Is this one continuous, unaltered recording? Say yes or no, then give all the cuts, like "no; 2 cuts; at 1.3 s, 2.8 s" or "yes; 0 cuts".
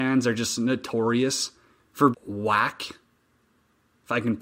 no; 1 cut; at 2.1 s